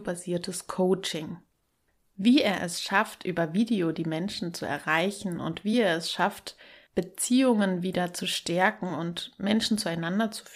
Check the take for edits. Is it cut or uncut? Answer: uncut